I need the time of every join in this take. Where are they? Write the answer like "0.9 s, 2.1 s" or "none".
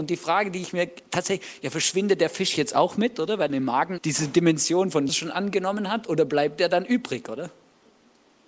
3.5 s, 4.0 s, 5.1 s